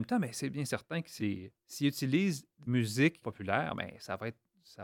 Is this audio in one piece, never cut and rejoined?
no; 4 cuts; at 1.2 s, 1.6 s, 2.7 s, 3.2 s

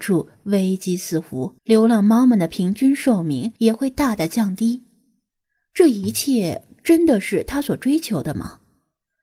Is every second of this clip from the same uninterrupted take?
no; 2 cuts; at 1.6 s, 3.6 s

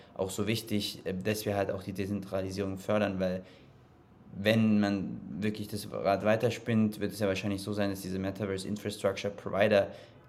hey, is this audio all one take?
yes; 0 cuts

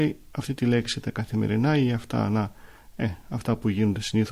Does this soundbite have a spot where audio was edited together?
no; 0 cuts

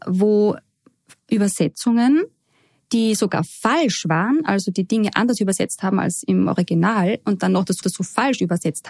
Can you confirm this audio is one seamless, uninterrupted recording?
no; 1 cut; at 7.8 s

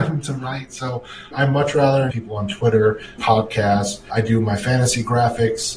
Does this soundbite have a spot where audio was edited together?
yes; 3 cuts; at 1.3 s, 2.1 s, 3.2 s

